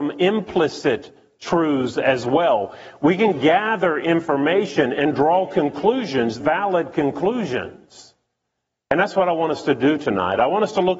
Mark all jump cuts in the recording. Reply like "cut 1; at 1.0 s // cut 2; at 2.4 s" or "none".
cut 1; at 6.4 s